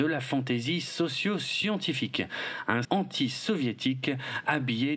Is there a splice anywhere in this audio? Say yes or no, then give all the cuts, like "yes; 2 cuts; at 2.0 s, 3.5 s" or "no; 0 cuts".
yes; 1 cut; at 2.8 s